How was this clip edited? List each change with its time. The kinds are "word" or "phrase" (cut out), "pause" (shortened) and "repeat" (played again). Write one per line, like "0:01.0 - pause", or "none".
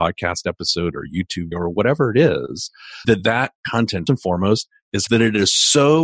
0:01.5 - word
0:03.0 - word
0:04.1 - word
0:05.1 - word